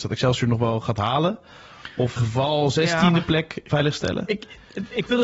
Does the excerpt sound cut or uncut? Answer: cut